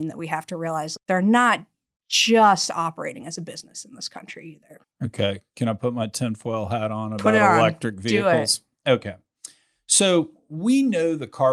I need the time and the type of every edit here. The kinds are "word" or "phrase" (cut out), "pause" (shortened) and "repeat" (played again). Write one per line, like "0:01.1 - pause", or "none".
0:01.0 - word
0:04.8 - pause

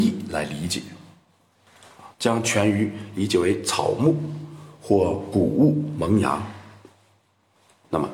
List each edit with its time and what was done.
0:02.1 - pause

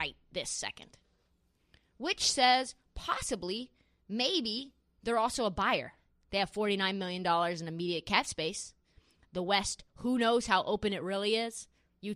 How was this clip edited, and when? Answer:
none

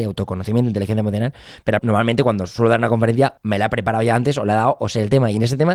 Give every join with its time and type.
0:01.8 - phrase
0:03.4 - pause

